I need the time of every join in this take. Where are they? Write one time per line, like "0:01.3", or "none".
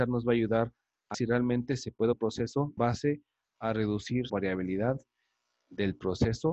0:01.1
0:02.1
0:02.8
0:04.3